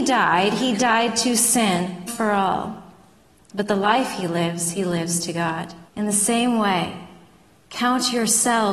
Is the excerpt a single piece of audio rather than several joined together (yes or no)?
no